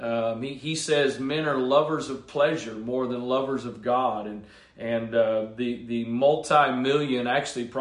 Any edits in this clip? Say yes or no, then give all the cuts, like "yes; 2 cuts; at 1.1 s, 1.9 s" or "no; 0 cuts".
no; 0 cuts